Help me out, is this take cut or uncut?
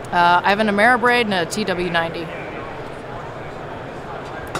uncut